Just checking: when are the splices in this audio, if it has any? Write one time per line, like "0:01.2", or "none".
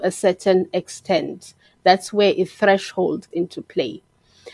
0:03.3